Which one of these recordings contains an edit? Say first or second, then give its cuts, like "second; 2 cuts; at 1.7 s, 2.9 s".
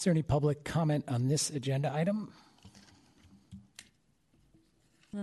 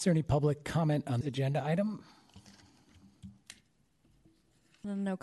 second; 1 cut; at 1.2 s